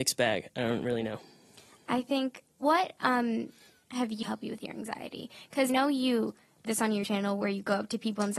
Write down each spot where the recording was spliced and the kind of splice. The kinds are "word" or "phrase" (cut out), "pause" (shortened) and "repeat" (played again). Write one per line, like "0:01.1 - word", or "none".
0:02.6 - word
0:04.2 - word
0:05.7 - word
0:06.6 - word
0:07.0 - word